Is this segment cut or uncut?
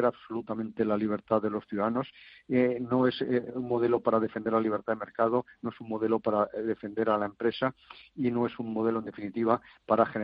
uncut